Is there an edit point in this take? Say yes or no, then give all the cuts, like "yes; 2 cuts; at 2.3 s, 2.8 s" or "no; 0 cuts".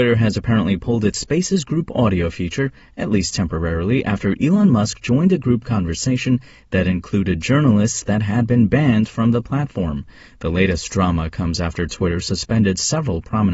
no; 0 cuts